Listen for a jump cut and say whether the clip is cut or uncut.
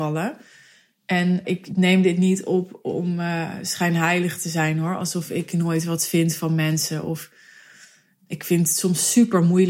uncut